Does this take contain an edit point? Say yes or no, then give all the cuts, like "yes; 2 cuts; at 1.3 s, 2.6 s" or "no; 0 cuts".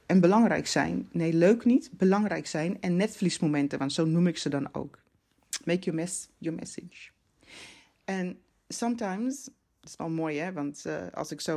no; 0 cuts